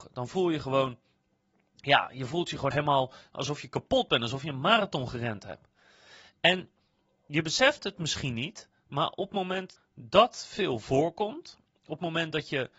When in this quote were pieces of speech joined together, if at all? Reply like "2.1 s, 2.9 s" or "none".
2.7 s, 9.8 s